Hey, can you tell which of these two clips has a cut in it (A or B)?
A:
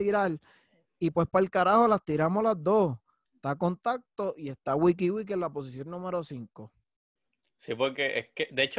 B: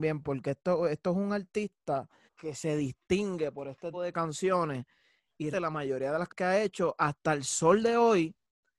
B